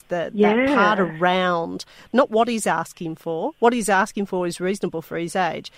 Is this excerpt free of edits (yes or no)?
yes